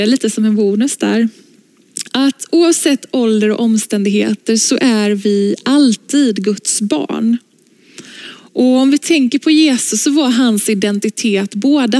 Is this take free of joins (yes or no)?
yes